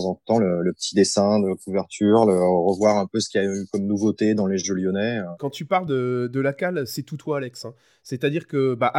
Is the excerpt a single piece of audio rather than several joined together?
yes; 0 cuts

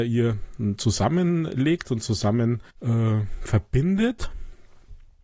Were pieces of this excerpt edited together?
yes; 1 cut; at 2.7 s

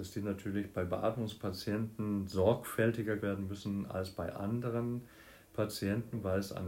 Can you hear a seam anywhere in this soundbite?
yes; 2 cuts; at 3.2 s, 4.3 s

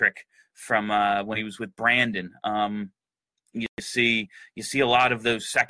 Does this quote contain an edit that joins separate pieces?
no; 0 cuts

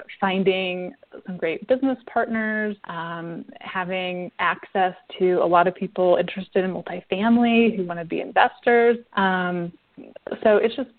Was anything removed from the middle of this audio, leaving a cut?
yes; 2 cuts; at 2.8 s, 9.1 s

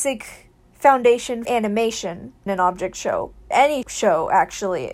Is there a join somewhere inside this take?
yes; 4 cuts; at 1.5 s, 2.5 s, 3.5 s, 3.8 s

